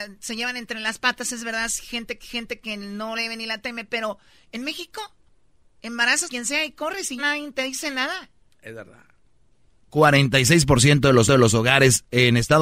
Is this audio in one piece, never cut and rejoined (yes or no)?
no